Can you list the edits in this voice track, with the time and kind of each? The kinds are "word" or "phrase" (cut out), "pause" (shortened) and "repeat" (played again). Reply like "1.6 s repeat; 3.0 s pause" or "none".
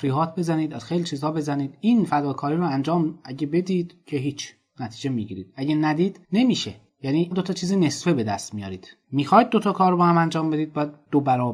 6.2 s pause; 7.3 s word; 9.0 s pause